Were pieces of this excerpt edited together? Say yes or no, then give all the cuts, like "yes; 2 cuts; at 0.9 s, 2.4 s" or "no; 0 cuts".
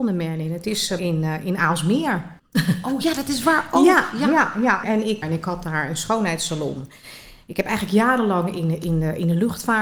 yes; 4 cuts; at 1.0 s, 2.4 s, 4.8 s, 5.2 s